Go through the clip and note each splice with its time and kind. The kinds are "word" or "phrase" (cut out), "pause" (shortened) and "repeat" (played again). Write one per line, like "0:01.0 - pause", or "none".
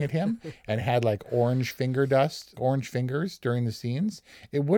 0:02.6 - word